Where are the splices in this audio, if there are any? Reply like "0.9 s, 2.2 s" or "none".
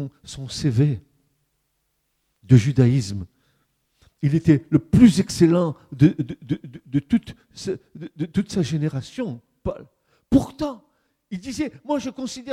none